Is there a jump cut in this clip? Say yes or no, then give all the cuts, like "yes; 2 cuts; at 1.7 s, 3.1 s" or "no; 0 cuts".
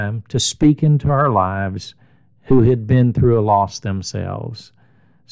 no; 0 cuts